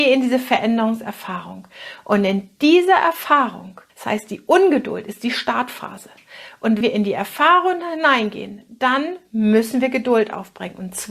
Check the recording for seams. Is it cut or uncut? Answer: cut